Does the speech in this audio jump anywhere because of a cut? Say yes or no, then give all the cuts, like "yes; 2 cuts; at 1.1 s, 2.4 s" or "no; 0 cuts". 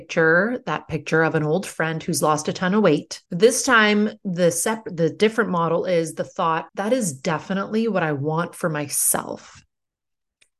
yes; 2 cuts; at 3.3 s, 6.7 s